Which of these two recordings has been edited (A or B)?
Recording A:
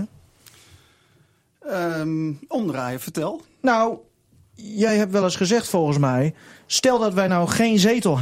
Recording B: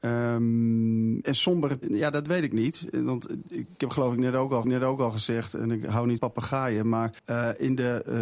B